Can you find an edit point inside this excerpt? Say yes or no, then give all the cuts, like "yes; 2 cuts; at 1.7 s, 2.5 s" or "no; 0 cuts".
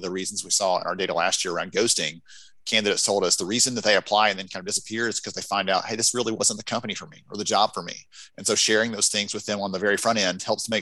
no; 0 cuts